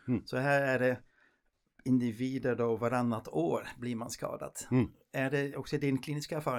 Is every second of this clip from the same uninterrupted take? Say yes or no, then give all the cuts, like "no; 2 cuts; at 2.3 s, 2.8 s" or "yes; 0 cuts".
yes; 0 cuts